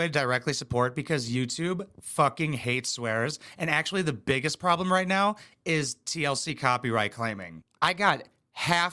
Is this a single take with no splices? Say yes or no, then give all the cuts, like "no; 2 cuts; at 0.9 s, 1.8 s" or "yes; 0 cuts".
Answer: yes; 0 cuts